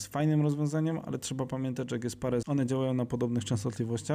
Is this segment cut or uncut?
cut